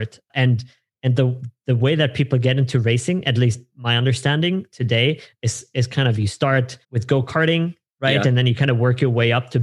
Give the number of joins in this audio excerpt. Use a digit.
1